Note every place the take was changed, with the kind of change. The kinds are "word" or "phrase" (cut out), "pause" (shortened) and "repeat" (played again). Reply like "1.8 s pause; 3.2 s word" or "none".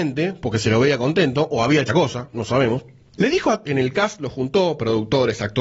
1.9 s word; 3.6 s word